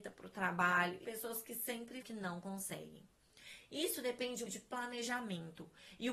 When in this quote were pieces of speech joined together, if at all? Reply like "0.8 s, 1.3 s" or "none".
1.0 s, 2.0 s, 4.5 s